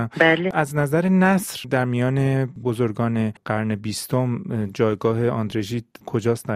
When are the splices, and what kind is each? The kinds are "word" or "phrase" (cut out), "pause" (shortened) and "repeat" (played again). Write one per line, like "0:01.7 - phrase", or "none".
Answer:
0:02.6 - word